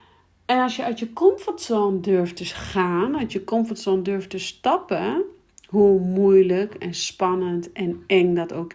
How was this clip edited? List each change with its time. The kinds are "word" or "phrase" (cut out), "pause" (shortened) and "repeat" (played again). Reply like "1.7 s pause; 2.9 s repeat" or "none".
none